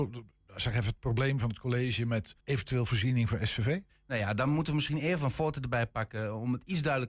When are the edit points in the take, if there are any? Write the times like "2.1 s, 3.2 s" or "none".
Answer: 2.4 s